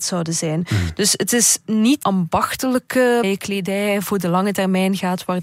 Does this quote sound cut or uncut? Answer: cut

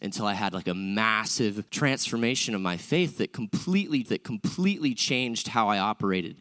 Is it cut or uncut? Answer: cut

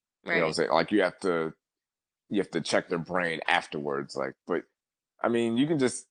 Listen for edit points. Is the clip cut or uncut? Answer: uncut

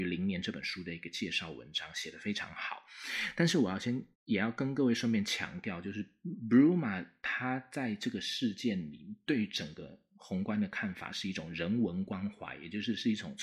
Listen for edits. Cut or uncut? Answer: cut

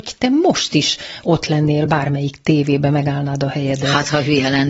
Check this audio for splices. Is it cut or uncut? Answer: uncut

